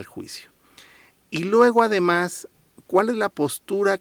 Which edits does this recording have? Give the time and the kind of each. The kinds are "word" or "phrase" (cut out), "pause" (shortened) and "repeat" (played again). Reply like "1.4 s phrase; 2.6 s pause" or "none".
none